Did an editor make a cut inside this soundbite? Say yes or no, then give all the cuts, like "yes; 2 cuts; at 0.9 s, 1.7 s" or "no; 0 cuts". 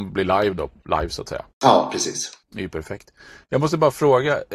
yes; 2 cuts; at 1.5 s, 2.4 s